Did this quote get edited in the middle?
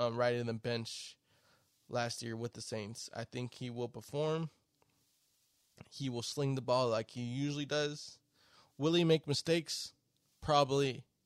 no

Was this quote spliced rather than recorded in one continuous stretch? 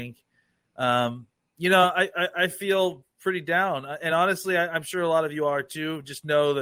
no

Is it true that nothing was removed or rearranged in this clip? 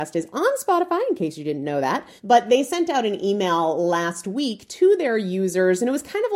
no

